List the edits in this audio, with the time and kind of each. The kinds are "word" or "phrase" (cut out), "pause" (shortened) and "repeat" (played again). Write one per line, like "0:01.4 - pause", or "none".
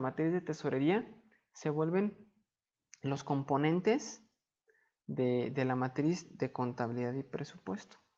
none